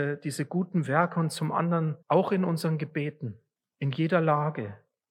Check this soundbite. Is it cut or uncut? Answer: cut